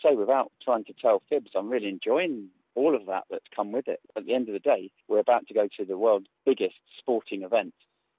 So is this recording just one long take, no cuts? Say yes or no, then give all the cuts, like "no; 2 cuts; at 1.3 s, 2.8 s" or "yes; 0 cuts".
no; 1 cut; at 5.0 s